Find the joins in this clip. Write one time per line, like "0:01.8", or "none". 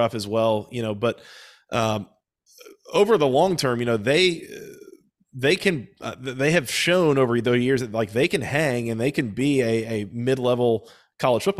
none